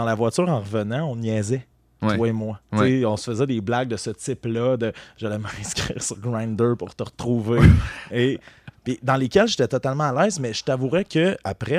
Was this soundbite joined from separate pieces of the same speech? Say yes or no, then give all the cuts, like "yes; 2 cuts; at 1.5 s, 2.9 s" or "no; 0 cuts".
no; 0 cuts